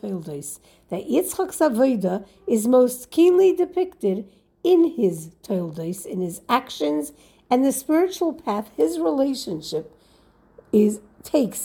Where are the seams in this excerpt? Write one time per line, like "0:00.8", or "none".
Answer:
none